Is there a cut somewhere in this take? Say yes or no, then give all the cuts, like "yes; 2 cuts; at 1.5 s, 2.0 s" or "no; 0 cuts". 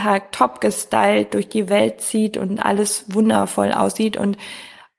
no; 0 cuts